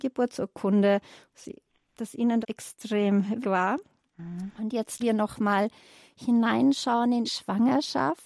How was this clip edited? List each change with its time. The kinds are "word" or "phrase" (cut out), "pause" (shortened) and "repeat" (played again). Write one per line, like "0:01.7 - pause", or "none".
0:01.9 - word
0:02.4 - word
0:03.4 - word
0:05.0 - word
0:07.2 - word